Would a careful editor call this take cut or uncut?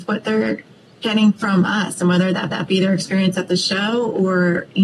cut